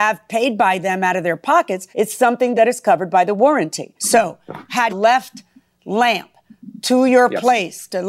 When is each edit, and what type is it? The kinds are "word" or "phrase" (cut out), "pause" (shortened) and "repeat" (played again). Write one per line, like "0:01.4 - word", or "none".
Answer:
0:01.9 - pause
0:02.5 - phrase
0:04.0 - pause
0:04.9 - phrase